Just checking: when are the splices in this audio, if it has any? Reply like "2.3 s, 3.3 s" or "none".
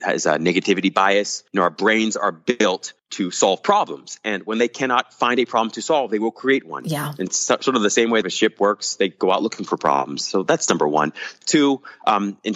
1.5 s, 3.0 s, 7.3 s, 8.2 s